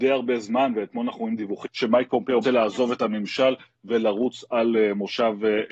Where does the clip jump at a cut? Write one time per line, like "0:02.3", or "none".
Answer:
0:01.6
0:02.4